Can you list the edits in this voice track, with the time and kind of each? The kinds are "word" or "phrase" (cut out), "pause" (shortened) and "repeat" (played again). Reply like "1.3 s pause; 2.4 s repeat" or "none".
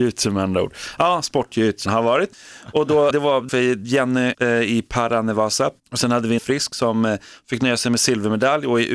1.9 s word; 2.3 s pause; 3.1 s word; 3.5 s phrase; 4.3 s word; 5.8 s pause; 6.4 s word